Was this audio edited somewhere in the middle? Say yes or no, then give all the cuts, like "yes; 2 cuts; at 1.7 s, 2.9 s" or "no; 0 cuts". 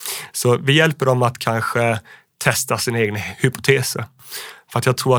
no; 0 cuts